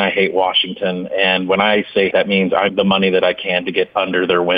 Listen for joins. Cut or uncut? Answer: cut